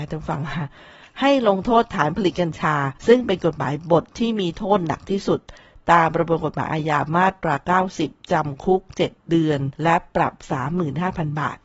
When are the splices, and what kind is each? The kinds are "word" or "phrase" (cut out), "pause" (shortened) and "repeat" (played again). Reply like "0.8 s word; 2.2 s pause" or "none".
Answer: 3.0 s pause; 9.7 s pause